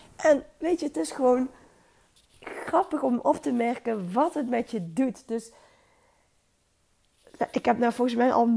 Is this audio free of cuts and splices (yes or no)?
yes